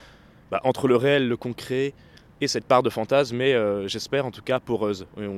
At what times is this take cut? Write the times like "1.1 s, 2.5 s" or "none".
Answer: none